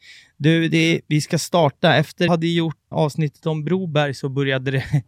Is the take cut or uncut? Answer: cut